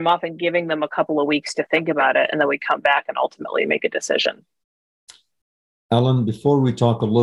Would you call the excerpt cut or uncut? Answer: uncut